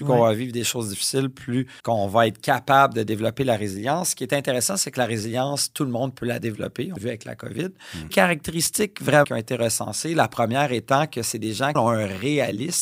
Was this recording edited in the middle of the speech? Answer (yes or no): yes